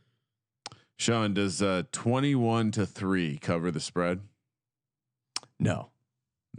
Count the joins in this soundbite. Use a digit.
0